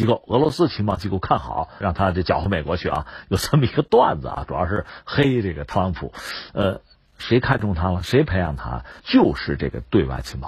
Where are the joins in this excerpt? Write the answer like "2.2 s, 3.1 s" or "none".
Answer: 1.8 s, 6.9 s, 9.0 s